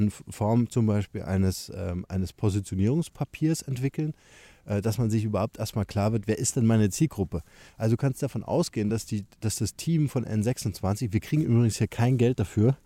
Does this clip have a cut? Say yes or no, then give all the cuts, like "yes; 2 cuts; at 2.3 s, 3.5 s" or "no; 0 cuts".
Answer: no; 0 cuts